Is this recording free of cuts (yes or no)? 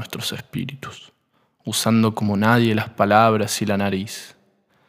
yes